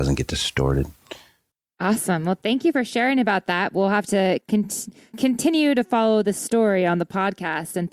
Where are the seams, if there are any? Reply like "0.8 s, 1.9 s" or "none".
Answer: 5.1 s